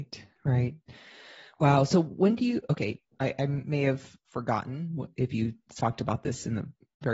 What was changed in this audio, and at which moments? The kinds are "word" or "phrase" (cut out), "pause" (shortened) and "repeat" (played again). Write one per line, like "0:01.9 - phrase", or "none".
none